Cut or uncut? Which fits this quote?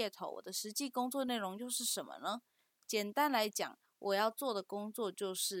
uncut